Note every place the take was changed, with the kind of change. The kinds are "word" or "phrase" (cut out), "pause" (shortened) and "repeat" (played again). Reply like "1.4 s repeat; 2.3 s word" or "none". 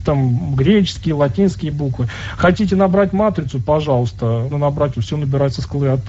4.5 s word; 4.9 s word